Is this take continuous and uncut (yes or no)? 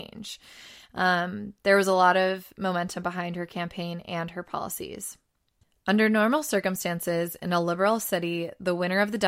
yes